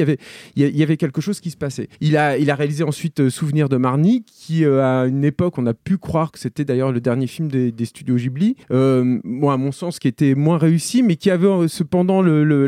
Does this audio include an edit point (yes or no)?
yes